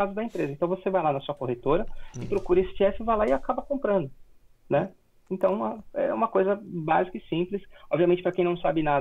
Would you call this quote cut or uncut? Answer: uncut